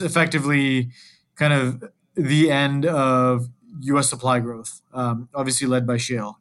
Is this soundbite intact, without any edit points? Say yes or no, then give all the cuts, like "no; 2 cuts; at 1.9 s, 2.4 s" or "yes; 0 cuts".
yes; 0 cuts